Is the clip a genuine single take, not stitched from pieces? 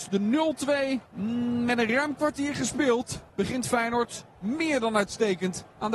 no; 2 cuts; at 1.1 s, 3.3 s

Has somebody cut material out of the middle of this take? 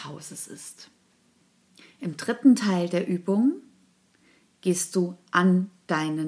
no; 0 cuts

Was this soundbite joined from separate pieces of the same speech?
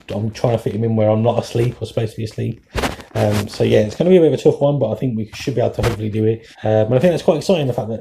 yes; 1 cut; at 6.5 s

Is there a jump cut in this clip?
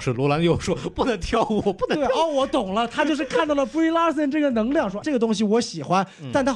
yes; 1 cut; at 5.0 s

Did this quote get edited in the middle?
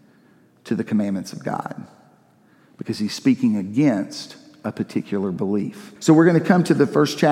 yes; 1 cut; at 6.0 s

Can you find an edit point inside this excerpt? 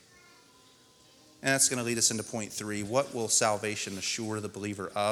no; 0 cuts

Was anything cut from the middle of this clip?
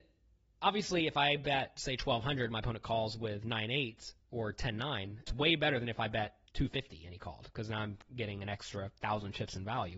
yes; 2 cuts; at 5.3 s, 6.5 s

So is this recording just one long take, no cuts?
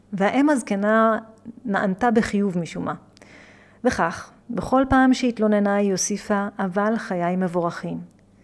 yes; 0 cuts

